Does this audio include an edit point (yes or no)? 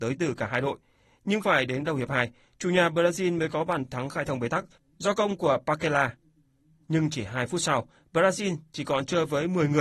no